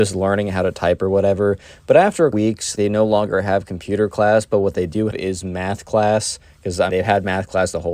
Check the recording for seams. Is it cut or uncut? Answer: cut